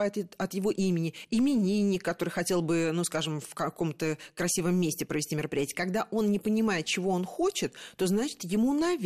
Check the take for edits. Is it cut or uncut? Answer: uncut